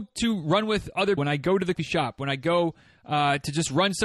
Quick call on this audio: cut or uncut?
cut